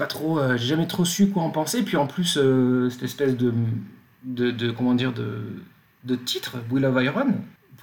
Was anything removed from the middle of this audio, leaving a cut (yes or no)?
no